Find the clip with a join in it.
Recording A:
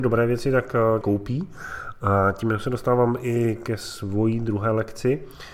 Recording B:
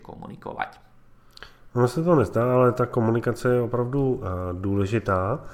A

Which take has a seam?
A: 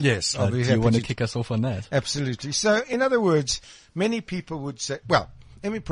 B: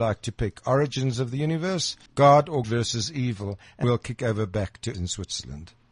B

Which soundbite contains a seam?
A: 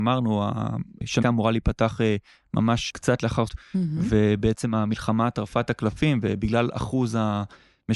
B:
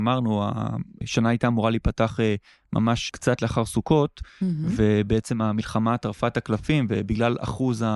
A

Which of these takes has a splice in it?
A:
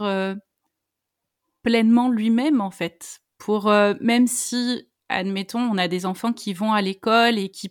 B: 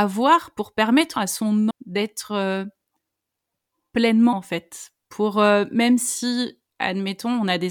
B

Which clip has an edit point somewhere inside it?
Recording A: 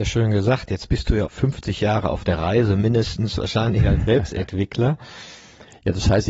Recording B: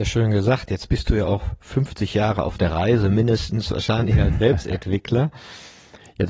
A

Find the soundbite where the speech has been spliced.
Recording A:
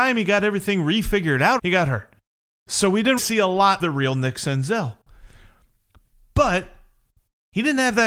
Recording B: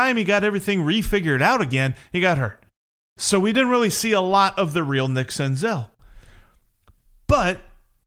A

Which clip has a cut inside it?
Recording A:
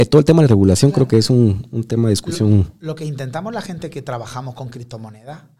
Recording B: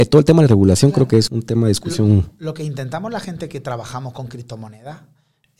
B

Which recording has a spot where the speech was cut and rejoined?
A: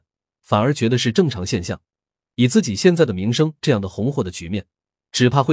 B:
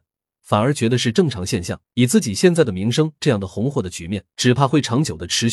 B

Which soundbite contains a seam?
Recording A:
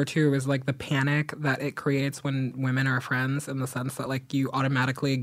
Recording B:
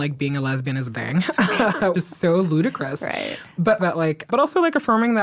B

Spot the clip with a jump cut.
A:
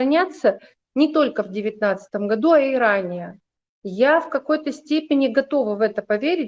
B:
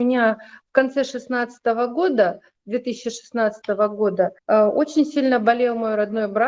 B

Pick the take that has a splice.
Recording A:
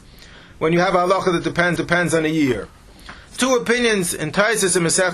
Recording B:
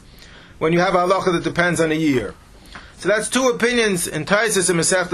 A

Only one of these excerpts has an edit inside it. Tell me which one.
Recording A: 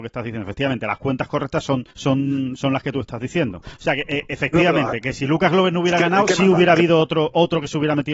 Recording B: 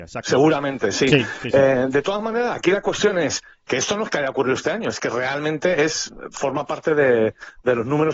A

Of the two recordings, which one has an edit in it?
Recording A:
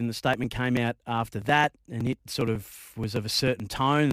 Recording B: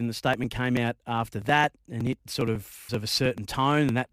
B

